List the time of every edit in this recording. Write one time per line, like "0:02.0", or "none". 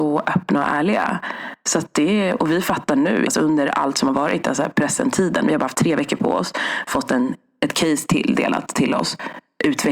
0:03.3